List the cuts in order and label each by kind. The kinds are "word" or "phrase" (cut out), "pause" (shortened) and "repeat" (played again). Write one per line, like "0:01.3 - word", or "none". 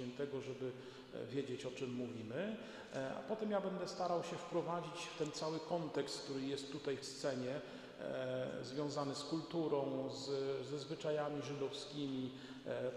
0:07.0 - word